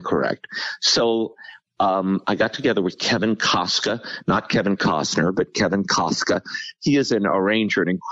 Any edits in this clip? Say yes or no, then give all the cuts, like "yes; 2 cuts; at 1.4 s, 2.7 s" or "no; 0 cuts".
no; 0 cuts